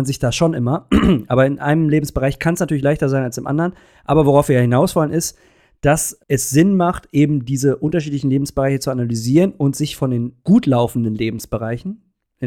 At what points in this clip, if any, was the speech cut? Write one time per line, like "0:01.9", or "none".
0:10.4

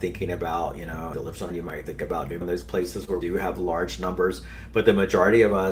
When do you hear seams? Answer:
0:01.1
0:01.5
0:02.4
0:03.2

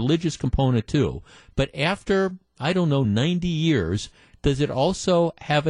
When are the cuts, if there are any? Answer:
none

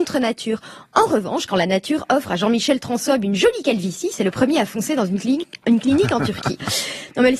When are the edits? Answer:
none

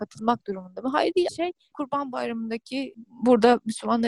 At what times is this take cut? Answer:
0:01.3

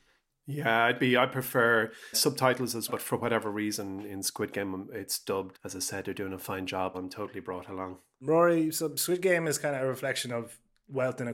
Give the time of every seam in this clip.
0:02.1
0:02.9
0:05.5
0:06.9

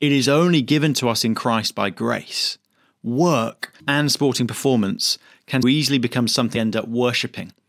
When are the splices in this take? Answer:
0:03.8
0:05.6
0:06.6

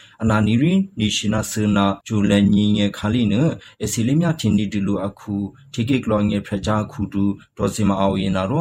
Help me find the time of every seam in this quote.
0:02.0

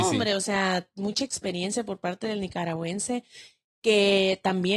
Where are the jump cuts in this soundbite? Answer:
none

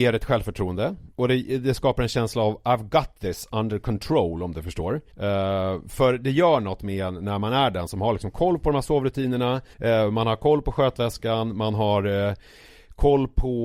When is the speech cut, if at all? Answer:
0:01.1
0:05.1
0:09.7

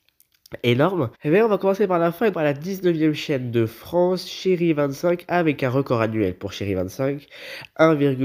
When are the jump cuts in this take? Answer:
0:01.1
0:02.3

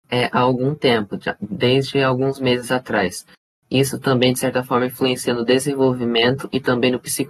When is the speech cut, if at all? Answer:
none

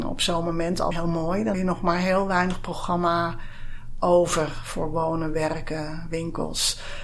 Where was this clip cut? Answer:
0:00.9
0:01.5

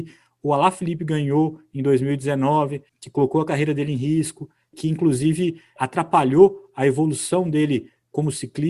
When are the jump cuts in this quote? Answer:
0:02.9
0:05.8

